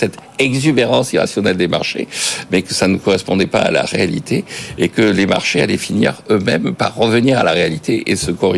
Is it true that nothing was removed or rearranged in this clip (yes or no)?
yes